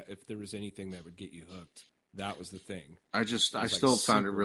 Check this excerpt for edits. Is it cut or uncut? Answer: cut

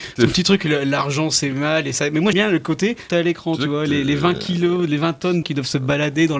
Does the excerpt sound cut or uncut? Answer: cut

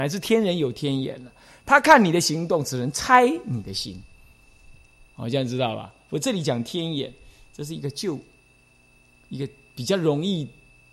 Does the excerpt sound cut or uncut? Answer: uncut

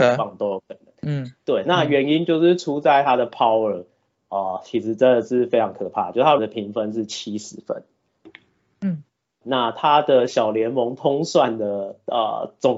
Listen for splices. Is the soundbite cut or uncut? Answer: cut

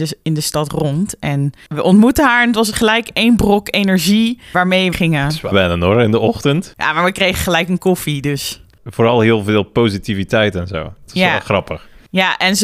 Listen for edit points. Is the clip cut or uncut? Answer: cut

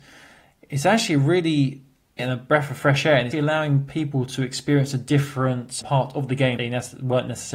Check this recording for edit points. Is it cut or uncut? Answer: cut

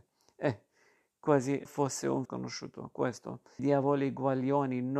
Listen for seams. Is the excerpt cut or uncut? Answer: cut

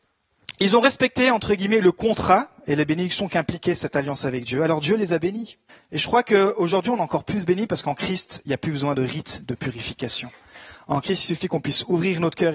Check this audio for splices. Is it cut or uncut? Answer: cut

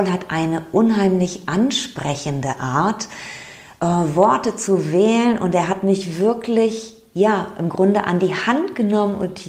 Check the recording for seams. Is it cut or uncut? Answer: uncut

